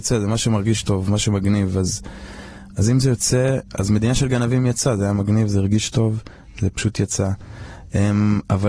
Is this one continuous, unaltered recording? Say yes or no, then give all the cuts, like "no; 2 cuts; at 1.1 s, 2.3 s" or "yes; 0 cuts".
yes; 0 cuts